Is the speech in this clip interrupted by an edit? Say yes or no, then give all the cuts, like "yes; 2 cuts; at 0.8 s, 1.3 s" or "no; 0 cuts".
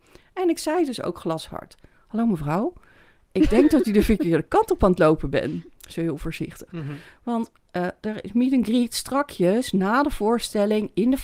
no; 0 cuts